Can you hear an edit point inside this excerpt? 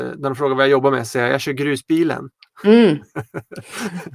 no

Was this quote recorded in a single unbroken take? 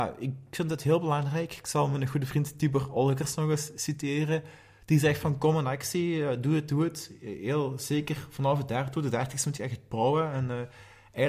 yes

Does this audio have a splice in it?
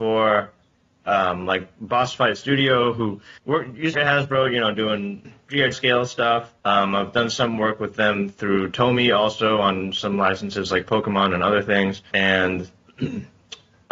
yes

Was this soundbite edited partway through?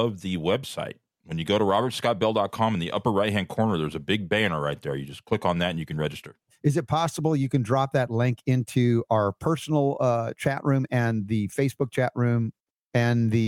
no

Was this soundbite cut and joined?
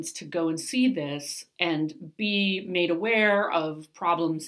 no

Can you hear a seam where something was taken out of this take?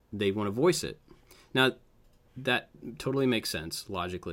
no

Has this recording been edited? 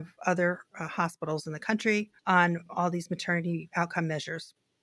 yes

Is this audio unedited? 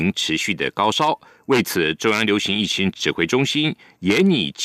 yes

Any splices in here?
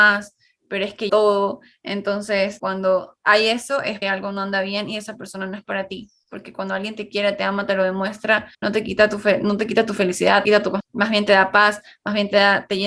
yes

